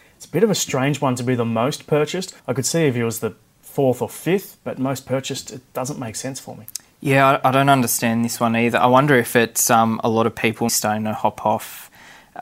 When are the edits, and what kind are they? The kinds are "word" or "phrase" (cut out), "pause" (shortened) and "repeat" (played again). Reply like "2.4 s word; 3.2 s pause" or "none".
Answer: 2.4 s pause; 10.7 s word